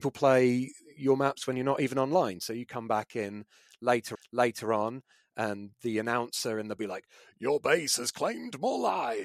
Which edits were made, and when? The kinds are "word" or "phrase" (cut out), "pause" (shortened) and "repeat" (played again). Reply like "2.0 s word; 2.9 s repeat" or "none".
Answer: 4.1 s repeat; 6.8 s phrase